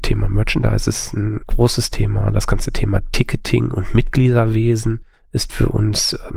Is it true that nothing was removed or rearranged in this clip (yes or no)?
no